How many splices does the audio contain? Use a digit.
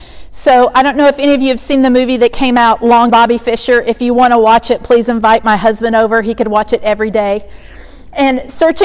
1